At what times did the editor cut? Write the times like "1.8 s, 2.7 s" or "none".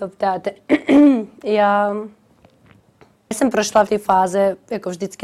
3.3 s, 3.9 s